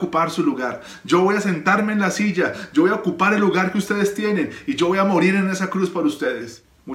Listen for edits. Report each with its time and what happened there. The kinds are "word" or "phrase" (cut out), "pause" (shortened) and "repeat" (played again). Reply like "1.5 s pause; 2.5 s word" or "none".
none